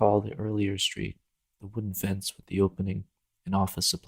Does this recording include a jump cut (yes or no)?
no